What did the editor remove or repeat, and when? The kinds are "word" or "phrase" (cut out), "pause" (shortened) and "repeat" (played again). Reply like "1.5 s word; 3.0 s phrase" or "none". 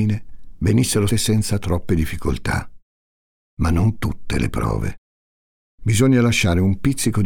1.1 s word; 4.0 s word